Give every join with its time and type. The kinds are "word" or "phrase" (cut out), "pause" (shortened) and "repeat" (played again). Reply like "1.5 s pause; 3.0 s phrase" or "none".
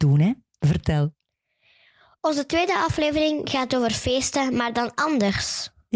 none